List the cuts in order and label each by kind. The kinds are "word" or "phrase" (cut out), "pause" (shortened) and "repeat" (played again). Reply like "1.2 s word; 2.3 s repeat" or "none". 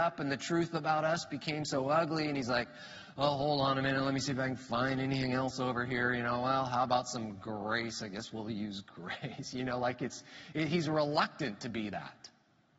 none